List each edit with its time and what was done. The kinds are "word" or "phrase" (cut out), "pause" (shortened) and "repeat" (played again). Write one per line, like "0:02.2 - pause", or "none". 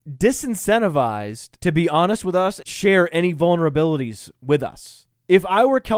0:01.6 - pause
0:02.7 - word